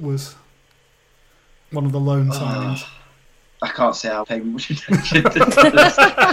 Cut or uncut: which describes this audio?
cut